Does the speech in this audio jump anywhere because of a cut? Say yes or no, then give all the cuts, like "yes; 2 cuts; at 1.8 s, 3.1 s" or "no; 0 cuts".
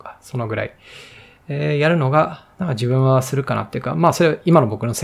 no; 0 cuts